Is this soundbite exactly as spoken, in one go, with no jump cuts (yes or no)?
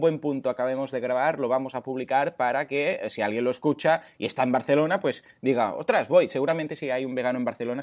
yes